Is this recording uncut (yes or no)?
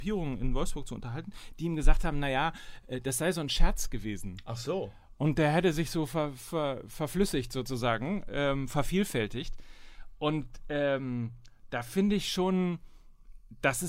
yes